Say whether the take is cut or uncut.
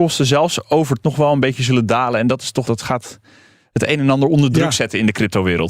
cut